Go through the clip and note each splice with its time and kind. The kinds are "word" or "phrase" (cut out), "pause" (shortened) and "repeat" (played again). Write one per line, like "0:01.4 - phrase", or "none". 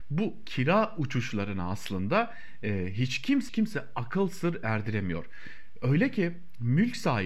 0:03.5 - phrase